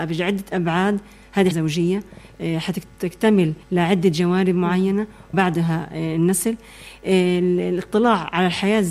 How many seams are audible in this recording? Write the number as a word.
three